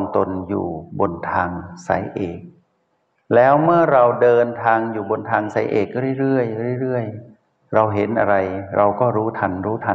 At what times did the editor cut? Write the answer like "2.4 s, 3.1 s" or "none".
none